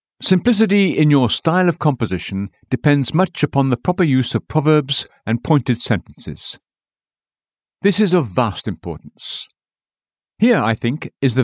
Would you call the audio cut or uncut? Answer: uncut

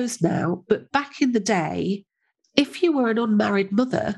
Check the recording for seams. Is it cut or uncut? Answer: uncut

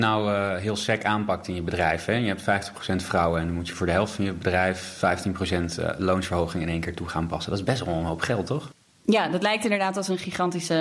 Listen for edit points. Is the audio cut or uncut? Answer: uncut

